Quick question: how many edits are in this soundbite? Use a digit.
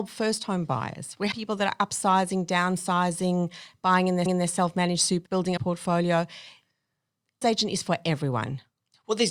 5